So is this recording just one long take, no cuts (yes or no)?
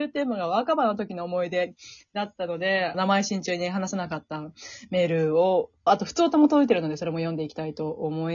no